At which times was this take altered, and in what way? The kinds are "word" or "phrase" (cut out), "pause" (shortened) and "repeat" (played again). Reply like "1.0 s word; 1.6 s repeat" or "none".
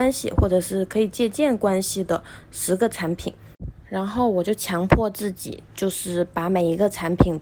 none